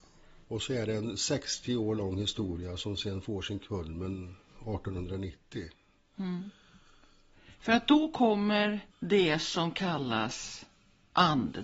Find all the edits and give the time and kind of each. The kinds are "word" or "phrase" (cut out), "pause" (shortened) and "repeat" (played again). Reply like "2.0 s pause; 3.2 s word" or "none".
8.9 s pause